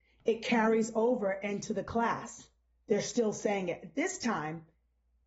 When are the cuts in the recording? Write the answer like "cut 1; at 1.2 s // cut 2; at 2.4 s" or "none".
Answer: none

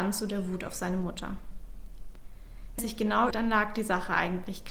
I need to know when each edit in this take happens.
cut 1; at 2.8 s // cut 2; at 3.3 s

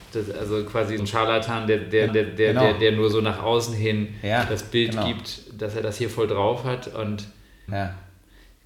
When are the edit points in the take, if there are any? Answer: cut 1; at 1.0 s // cut 2; at 2.1 s // cut 3; at 7.7 s

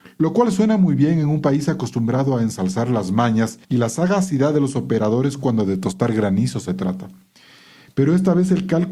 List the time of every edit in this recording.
cut 1; at 3.6 s

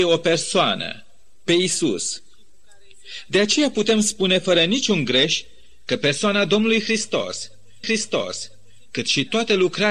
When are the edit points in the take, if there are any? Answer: cut 1; at 7.8 s

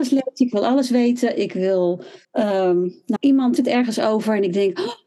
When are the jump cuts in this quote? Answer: cut 1; at 2.2 s // cut 2; at 3.2 s // cut 3; at 3.6 s

